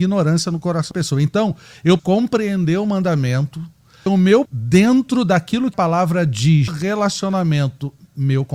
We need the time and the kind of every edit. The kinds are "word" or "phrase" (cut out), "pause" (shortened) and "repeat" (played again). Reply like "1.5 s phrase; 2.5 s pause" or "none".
0.9 s word; 2.0 s word; 4.1 s word; 4.5 s word; 5.7 s word; 6.7 s word